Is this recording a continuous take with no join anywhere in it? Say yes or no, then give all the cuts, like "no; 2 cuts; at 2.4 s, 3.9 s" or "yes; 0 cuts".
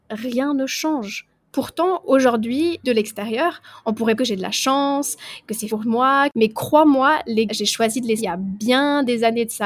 no; 5 cuts; at 2.8 s, 4.2 s, 5.7 s, 7.5 s, 8.2 s